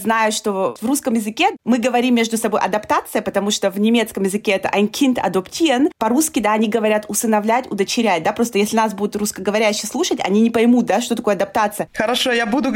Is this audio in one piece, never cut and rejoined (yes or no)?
yes